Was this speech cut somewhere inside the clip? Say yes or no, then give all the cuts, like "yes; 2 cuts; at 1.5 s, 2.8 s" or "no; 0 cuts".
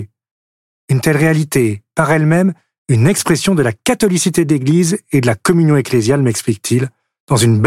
no; 0 cuts